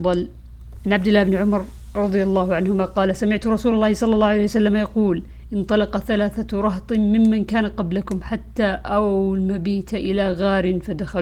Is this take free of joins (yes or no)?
yes